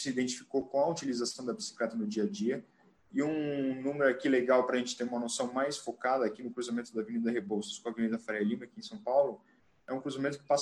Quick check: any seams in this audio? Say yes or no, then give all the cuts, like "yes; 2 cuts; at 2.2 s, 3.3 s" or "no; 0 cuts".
no; 0 cuts